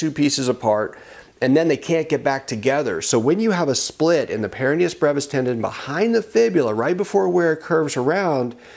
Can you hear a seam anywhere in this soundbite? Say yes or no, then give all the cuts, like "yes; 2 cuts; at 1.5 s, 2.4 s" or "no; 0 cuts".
no; 0 cuts